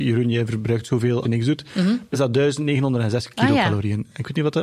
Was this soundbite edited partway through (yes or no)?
yes